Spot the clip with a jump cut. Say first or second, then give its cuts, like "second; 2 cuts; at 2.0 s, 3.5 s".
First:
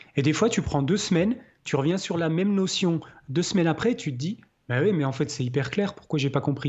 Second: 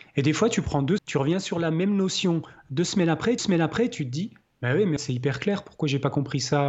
second; 3 cuts; at 1.0 s, 3.4 s, 5.0 s